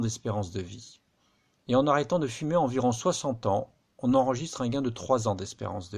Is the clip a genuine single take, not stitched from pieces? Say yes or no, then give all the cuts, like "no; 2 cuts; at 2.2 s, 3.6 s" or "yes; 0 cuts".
yes; 0 cuts